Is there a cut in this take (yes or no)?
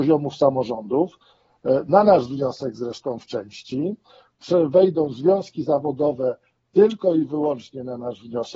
no